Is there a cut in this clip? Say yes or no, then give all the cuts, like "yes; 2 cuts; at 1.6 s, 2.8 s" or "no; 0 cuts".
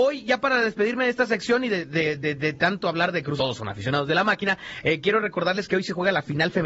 yes; 1 cut; at 3.4 s